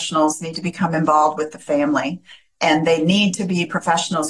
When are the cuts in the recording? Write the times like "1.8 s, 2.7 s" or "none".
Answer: none